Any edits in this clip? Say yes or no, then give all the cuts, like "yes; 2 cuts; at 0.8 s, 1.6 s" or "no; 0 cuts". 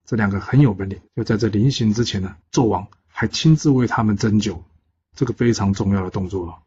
yes; 3 cuts; at 1.1 s, 2.4 s, 5.1 s